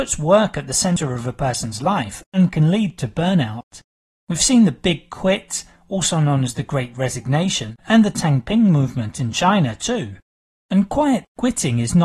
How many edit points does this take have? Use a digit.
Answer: 1